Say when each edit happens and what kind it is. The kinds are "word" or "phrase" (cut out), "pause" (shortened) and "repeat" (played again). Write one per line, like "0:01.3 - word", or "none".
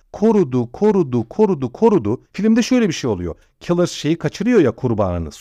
0:02.2 - pause